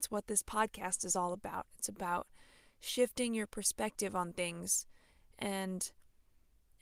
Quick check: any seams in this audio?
no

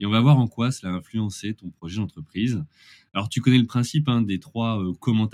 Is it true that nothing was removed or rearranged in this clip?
yes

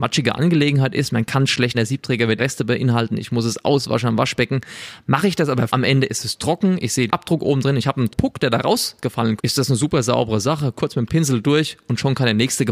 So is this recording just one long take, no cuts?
no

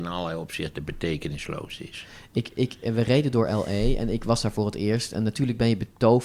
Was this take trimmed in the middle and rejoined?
no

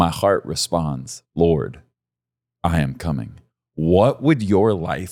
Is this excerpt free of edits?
yes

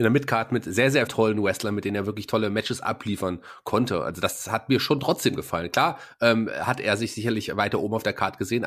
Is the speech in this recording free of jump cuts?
no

